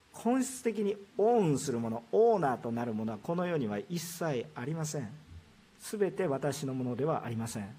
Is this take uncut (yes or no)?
no